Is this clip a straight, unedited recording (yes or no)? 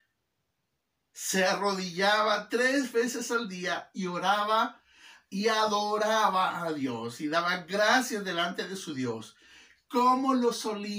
yes